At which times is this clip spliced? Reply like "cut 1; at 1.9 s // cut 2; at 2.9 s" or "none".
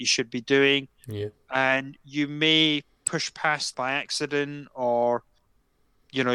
cut 1; at 3.7 s